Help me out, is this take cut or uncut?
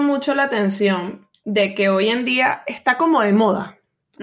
uncut